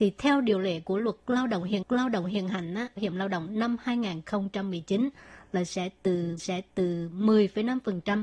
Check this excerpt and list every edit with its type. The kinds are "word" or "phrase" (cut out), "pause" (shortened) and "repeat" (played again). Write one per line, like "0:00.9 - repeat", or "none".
0:01.8 - repeat
0:03.0 - phrase
0:06.4 - repeat